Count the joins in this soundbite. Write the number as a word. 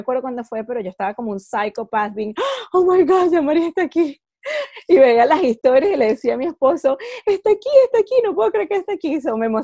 zero